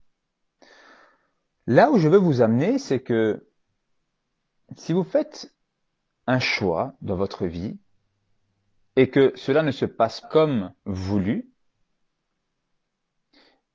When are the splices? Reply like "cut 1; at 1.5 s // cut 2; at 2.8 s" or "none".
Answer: cut 1; at 8.8 s // cut 2; at 10.2 s

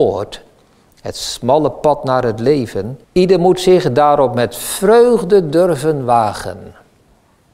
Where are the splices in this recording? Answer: cut 1; at 3.0 s

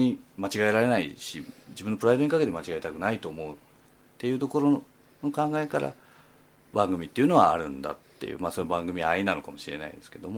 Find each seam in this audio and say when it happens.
none

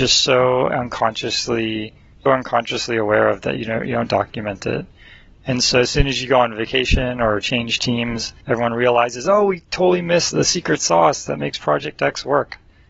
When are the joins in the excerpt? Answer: cut 1; at 2.3 s // cut 2; at 8.4 s // cut 3; at 10.3 s

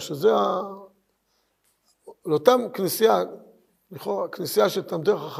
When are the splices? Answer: none

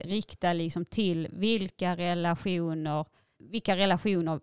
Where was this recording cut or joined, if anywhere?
cut 1; at 3.3 s

